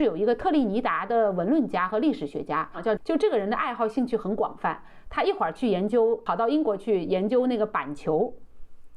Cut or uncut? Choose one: cut